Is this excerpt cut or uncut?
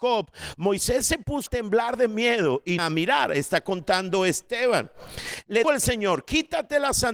cut